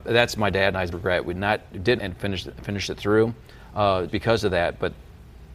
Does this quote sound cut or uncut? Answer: cut